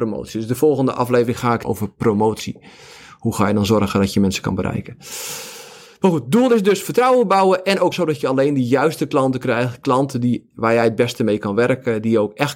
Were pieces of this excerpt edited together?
yes; 2 cuts; at 1.6 s, 7.9 s

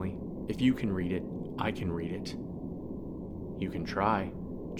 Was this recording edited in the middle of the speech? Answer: no; 0 cuts

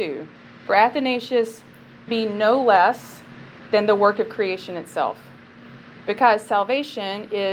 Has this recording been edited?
yes; 1 cut; at 2.1 s

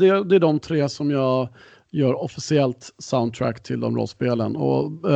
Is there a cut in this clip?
no; 0 cuts

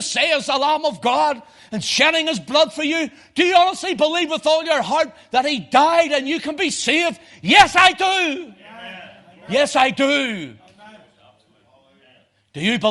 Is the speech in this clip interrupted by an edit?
no; 0 cuts

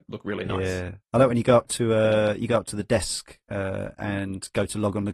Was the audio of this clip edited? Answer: yes; 1 cut; at 1.0 s

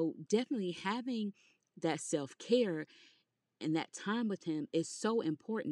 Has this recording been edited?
no; 0 cuts

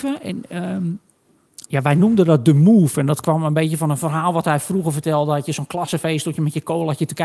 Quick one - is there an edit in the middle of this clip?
no; 0 cuts

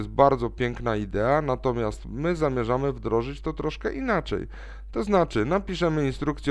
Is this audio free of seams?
yes; 0 cuts

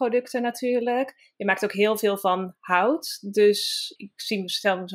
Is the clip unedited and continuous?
no; 1 cut; at 4.0 s

